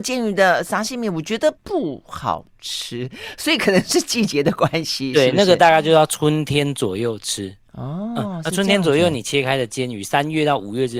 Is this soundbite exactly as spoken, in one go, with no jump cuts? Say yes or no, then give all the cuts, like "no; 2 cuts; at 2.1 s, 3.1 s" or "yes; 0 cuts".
no; 2 cuts; at 1.6 s, 7.6 s